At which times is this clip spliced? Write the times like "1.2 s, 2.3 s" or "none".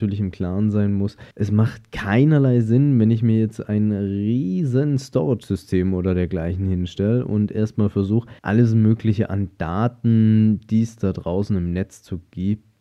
1.3 s, 8.4 s